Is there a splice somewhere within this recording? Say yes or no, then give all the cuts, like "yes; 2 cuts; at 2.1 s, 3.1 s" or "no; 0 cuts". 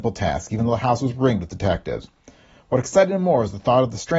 no; 0 cuts